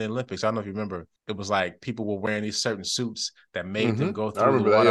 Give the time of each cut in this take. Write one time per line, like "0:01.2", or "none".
0:01.2

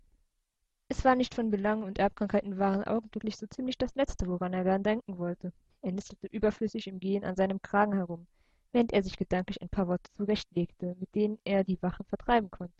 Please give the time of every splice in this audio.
0:05.7

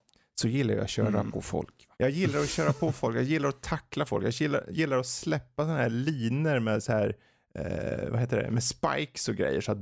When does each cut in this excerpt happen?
0:01.9

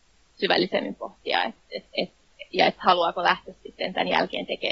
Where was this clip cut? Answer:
none

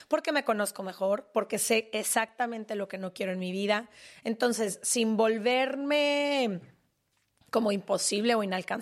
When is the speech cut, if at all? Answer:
none

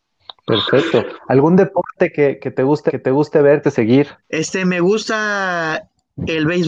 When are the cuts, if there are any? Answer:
0:02.9
0:03.6
0:04.2

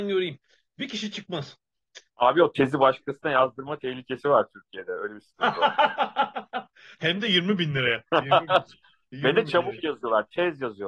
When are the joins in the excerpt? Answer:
0:02.1
0:08.1

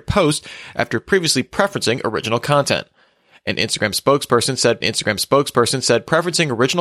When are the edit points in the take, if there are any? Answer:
0:04.8

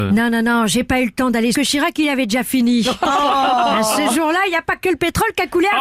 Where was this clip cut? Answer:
0:01.5

